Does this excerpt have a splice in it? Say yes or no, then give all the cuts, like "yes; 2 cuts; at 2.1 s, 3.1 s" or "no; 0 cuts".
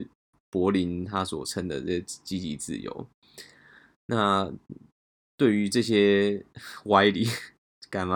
no; 0 cuts